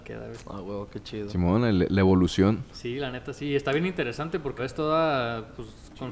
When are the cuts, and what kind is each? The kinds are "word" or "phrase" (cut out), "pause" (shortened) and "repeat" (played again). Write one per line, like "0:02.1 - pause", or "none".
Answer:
0:04.6 - word